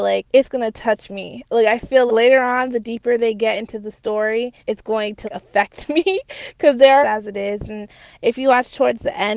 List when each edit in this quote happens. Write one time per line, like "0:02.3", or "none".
0:02.1
0:04.6
0:05.2
0:07.0